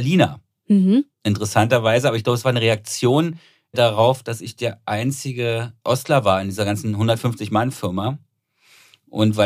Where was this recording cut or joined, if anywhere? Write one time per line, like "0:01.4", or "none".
none